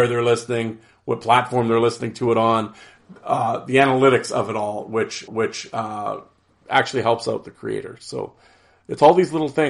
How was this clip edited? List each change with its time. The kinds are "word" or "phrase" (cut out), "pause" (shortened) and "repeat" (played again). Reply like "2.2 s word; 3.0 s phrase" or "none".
5.3 s repeat